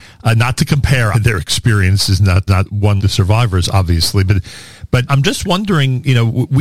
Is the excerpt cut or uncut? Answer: cut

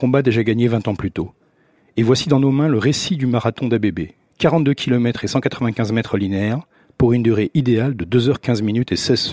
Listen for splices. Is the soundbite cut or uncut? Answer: uncut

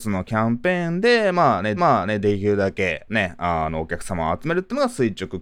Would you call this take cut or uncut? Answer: cut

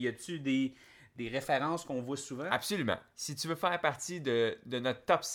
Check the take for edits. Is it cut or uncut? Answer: uncut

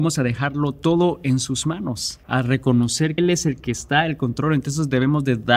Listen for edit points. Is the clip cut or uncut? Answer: cut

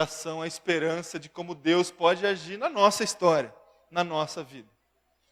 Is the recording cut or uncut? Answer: uncut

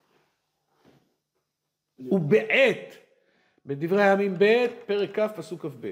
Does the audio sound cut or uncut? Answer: uncut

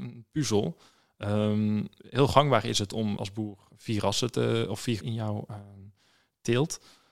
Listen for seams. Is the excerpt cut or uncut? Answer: cut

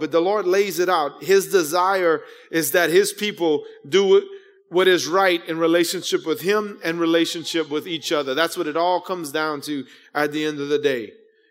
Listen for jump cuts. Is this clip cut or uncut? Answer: uncut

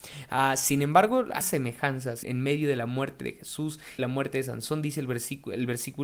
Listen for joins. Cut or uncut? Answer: cut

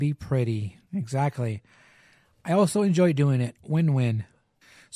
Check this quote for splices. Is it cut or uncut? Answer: uncut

